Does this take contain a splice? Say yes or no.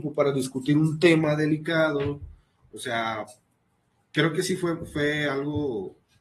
no